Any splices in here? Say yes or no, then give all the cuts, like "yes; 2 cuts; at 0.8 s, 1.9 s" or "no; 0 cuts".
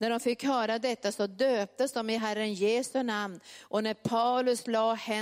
no; 0 cuts